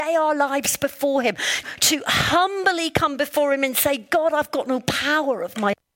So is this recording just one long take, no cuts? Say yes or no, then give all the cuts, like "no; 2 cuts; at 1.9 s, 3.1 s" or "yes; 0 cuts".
no; 1 cut; at 1.6 s